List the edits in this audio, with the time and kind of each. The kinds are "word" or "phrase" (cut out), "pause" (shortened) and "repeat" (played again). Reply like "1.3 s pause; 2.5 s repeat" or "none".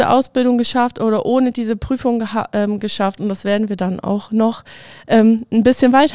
none